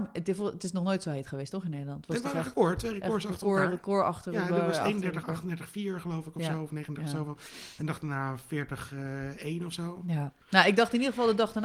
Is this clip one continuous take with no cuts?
no; 1 cut; at 10.4 s

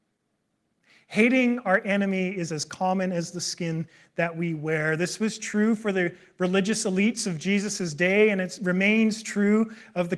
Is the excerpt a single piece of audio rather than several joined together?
yes; 0 cuts

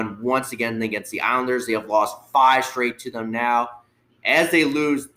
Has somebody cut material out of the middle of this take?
no; 0 cuts

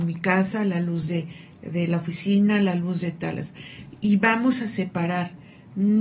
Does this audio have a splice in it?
no; 0 cuts

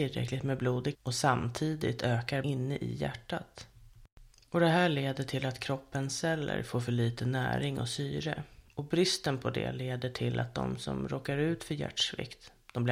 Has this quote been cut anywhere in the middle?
yes; 2 cuts; at 0.9 s, 2.4 s

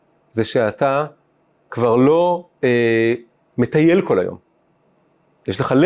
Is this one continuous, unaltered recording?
yes; 0 cuts

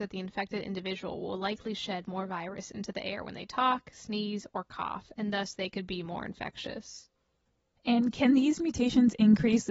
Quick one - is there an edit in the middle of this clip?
no; 0 cuts

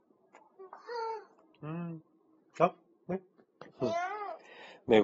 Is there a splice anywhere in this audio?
no; 0 cuts

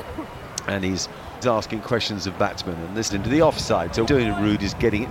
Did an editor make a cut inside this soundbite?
yes; 3 cuts; at 1.4 s, 3.1 s, 4.1 s

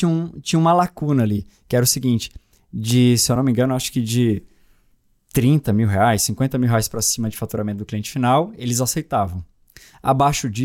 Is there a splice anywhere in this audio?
no; 0 cuts

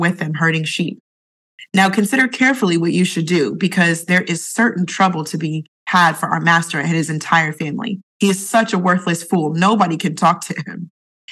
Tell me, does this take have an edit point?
yes; 1 cut; at 8.1 s

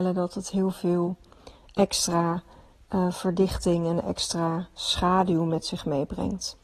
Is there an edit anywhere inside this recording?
no; 0 cuts

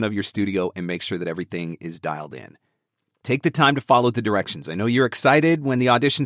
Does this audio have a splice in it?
no; 0 cuts

